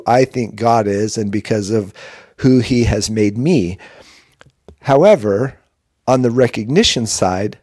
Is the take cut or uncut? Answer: uncut